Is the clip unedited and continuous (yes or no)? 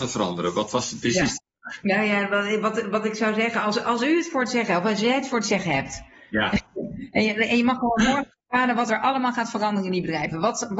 yes